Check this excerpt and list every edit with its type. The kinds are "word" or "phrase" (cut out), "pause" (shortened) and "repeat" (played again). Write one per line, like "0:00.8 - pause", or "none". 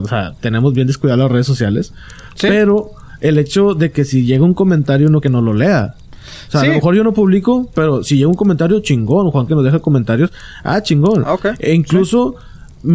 0:05.2 - phrase
0:09.5 - phrase